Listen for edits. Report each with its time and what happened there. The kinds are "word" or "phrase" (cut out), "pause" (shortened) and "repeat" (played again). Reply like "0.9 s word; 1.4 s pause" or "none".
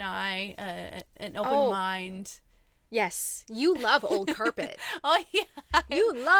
none